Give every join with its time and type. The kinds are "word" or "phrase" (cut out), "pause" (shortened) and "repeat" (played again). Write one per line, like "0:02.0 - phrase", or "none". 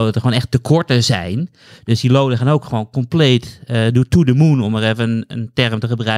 none